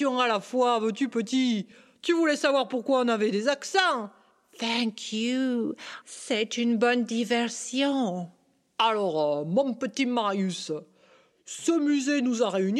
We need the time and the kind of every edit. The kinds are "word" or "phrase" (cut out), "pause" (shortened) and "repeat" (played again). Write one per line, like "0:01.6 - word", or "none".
none